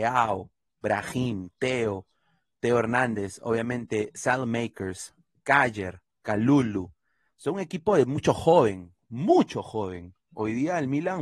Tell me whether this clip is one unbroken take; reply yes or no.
yes